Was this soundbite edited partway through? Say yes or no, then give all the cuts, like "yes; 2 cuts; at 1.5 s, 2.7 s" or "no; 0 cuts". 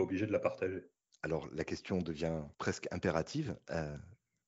yes; 1 cut; at 2.5 s